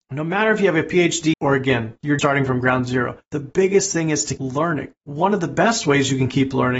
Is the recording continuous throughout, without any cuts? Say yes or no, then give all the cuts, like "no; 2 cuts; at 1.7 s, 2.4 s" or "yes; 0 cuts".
no; 5 cuts; at 1.3 s, 2.2 s, 3.2 s, 4.4 s, 5.0 s